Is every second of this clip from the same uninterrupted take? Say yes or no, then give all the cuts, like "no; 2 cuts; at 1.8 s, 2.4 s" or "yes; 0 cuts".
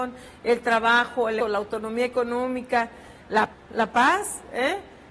no; 2 cuts; at 1.4 s, 3.5 s